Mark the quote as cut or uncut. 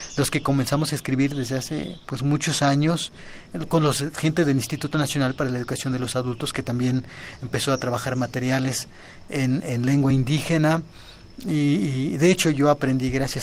uncut